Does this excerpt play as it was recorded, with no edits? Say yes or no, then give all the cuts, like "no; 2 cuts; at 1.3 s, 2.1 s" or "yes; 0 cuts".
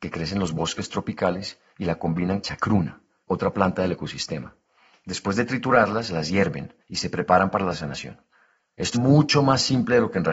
no; 4 cuts; at 2.4 s, 6.8 s, 7.7 s, 8.9 s